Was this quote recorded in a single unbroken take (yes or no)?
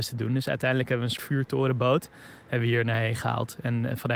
no